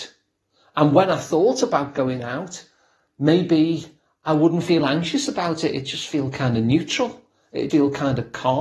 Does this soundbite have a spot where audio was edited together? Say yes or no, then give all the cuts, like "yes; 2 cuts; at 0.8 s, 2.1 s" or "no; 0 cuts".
yes; 1 cut; at 7.7 s